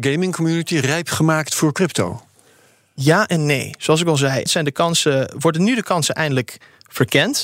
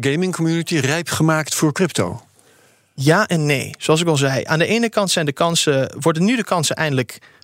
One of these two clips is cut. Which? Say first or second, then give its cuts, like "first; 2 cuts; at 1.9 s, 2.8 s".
first; 1 cut; at 4.5 s